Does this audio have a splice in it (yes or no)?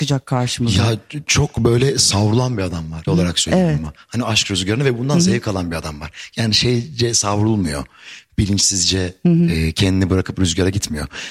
yes